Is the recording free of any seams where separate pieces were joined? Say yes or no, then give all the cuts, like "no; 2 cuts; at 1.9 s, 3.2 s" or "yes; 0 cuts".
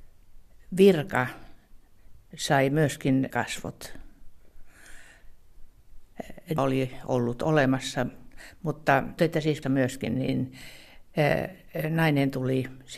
no; 4 cuts; at 3.3 s, 6.6 s, 9.2 s, 9.6 s